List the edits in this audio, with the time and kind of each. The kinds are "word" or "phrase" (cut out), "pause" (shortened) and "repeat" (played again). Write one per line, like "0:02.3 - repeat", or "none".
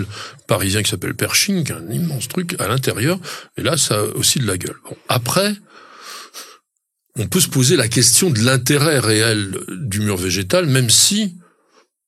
none